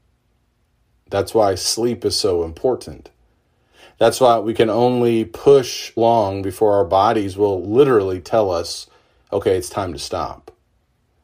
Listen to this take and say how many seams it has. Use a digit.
1